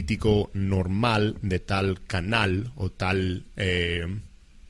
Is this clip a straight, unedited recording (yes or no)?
yes